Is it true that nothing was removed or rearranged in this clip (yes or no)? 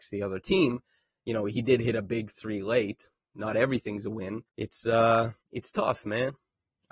no